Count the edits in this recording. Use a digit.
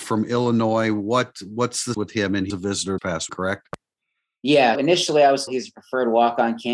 6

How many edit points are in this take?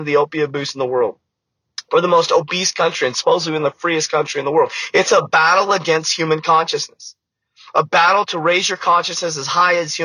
0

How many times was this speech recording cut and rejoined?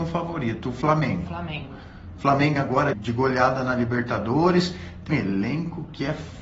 3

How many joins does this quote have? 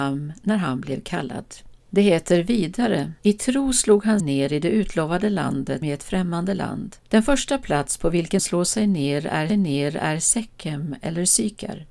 7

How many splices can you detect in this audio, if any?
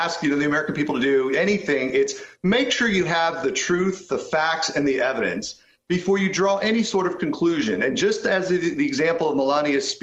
0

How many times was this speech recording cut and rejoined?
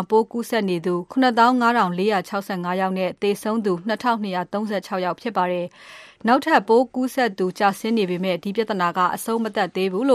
1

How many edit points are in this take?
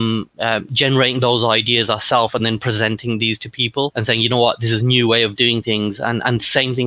0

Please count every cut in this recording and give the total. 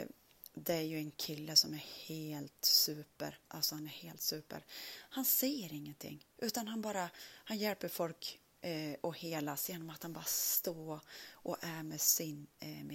2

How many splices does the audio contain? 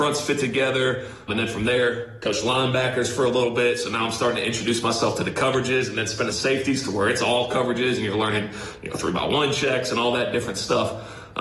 2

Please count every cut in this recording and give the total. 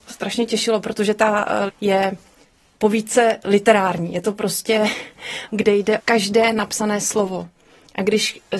3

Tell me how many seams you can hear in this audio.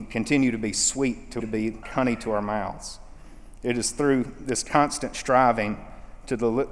2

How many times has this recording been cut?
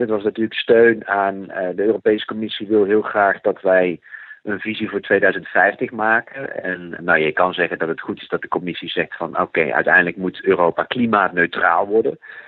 1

